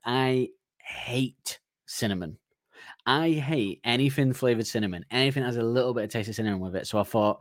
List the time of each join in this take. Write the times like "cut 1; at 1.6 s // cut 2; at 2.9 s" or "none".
none